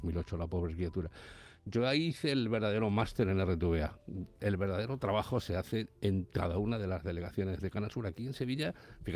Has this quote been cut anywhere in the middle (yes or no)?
no